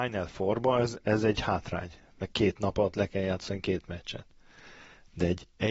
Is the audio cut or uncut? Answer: uncut